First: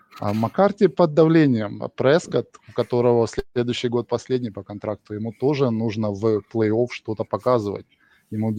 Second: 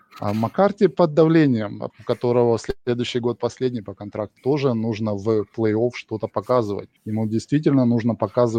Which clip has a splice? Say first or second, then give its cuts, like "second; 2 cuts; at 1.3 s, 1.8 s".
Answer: second; 3 cuts; at 1.9 s, 4.4 s, 7.0 s